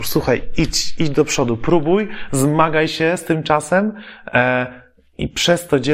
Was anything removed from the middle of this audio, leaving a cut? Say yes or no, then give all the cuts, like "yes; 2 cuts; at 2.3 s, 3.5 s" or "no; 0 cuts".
no; 0 cuts